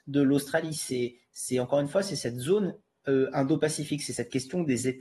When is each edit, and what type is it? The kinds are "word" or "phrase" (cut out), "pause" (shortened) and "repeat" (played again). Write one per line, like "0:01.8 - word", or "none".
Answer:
none